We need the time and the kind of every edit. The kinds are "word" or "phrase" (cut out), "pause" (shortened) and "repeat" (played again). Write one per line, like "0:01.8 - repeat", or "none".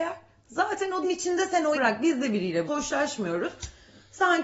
0:01.0 - word
0:01.7 - word
0:02.7 - word